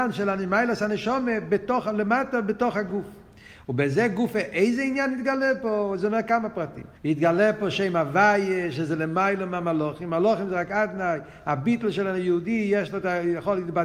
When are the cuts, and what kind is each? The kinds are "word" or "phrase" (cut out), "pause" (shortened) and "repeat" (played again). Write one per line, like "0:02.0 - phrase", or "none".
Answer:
0:07.0 - pause